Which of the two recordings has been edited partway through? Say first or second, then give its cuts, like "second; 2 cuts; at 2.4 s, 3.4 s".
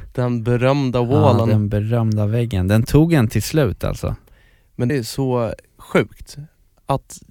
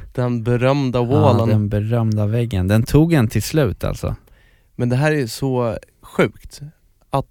first; 1 cut; at 4.9 s